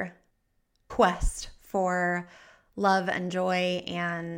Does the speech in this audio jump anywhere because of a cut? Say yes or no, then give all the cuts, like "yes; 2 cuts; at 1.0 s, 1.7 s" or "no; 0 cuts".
no; 0 cuts